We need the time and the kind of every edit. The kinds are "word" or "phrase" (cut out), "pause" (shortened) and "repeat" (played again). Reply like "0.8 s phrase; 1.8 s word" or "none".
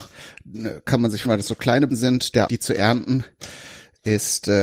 1.2 s word; 1.9 s word; 2.5 s word